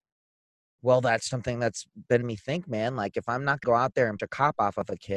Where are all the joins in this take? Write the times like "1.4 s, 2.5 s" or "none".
1.3 s, 2.2 s, 3.6 s, 4.2 s